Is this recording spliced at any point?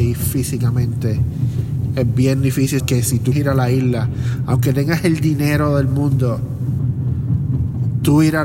yes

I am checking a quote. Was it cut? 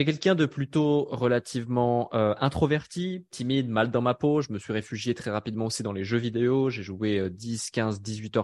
no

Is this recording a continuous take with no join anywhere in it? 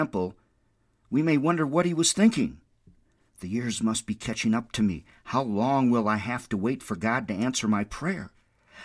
yes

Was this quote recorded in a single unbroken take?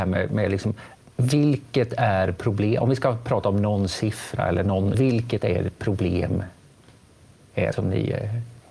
no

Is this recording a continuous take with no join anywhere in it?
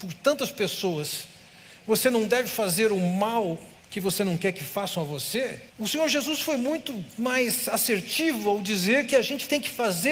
no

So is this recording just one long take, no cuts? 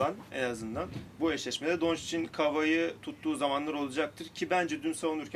no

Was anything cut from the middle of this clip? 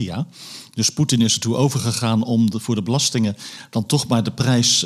no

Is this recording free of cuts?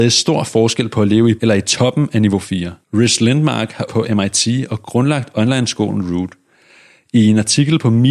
no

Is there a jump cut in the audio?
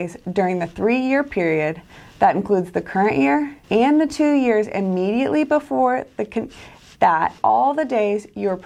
yes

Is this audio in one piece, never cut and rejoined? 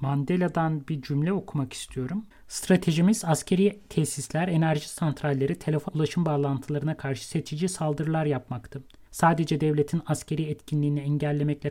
no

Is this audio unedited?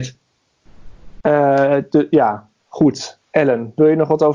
no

